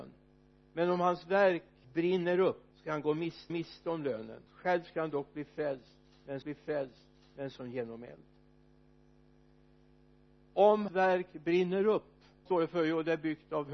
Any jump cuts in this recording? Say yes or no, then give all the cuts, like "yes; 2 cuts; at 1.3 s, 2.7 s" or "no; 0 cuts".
yes; 7 cuts; at 1.8 s, 2.7 s, 3.5 s, 4.5 s, 6.4 s, 10.9 s, 12.5 s